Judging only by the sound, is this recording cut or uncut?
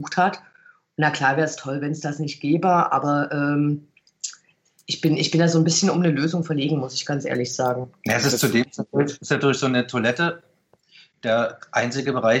uncut